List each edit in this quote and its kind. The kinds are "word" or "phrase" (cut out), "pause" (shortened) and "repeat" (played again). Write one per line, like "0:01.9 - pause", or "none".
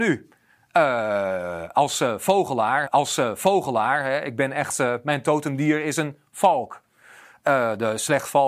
0:02.9 - repeat